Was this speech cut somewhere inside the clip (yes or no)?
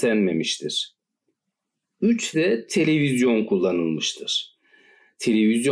yes